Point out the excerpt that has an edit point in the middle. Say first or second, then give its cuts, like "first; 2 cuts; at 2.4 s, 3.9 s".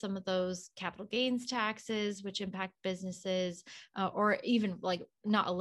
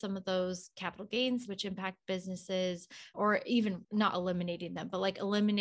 second; 3 cuts; at 1.5 s, 3.1 s, 3.8 s